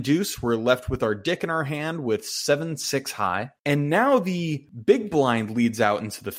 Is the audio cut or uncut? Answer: cut